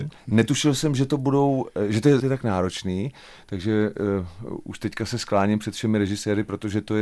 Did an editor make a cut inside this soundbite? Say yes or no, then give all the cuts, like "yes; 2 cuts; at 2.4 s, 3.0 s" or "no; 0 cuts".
yes; 1 cut; at 2.2 s